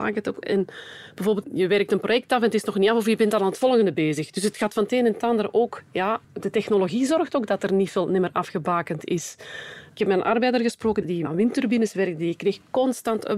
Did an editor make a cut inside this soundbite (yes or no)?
yes